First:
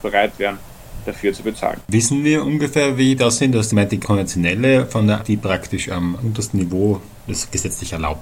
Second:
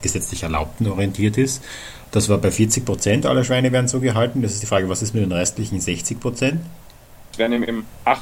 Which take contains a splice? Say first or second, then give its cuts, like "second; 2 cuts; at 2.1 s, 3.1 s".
first; 6 cuts; at 1.8 s, 3.2 s, 3.7 s, 4.0 s, 5.2 s, 6.2 s